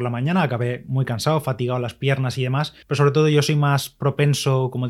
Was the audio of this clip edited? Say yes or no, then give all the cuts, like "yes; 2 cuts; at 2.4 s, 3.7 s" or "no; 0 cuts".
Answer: yes; 1 cut; at 2.8 s